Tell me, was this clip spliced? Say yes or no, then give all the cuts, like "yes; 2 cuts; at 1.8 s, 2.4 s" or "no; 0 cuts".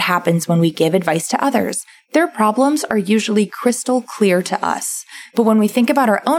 no; 0 cuts